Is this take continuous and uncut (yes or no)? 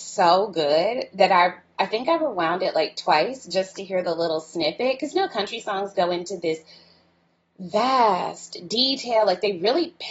yes